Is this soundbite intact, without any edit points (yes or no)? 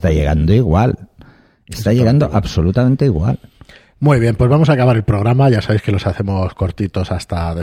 yes